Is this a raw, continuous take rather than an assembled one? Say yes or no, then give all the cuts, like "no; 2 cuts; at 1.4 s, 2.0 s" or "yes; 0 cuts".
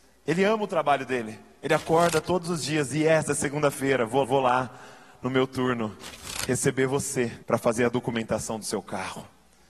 no; 2 cuts; at 4.2 s, 7.4 s